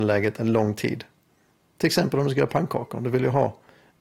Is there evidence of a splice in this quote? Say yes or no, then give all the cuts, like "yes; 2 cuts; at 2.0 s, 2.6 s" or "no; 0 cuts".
no; 0 cuts